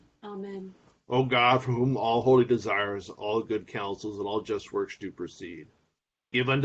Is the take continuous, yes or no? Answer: yes